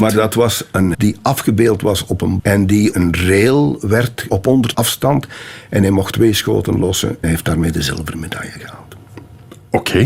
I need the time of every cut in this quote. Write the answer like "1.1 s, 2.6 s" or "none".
0.9 s, 2.4 s, 2.9 s, 4.3 s, 4.7 s, 6.1 s, 7.2 s